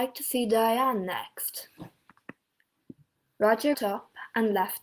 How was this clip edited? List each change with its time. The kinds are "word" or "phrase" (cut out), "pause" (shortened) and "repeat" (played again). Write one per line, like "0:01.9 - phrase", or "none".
0:03.7 - word